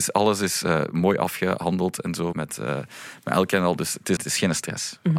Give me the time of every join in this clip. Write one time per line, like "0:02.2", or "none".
0:02.3
0:04.2